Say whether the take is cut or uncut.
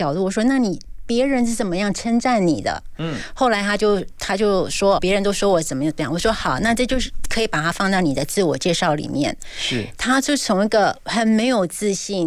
cut